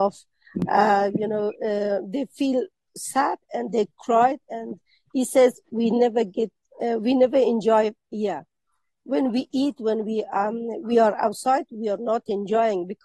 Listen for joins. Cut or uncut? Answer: uncut